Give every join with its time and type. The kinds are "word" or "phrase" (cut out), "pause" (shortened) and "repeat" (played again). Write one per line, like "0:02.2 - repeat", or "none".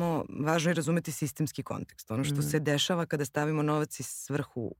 none